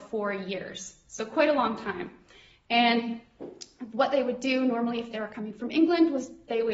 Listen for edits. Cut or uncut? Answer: uncut